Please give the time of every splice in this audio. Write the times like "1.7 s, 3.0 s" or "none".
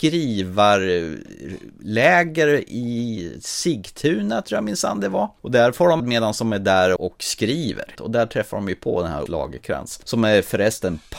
6.0 s, 7.0 s, 9.3 s